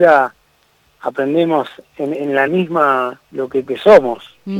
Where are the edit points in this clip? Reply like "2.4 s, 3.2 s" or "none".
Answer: 2.5 s, 3.2 s, 3.7 s

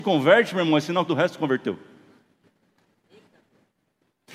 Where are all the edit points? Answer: 1.1 s

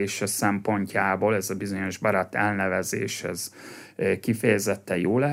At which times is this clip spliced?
none

